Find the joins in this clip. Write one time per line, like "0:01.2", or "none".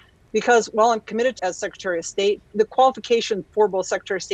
0:01.4
0:02.5
0:03.4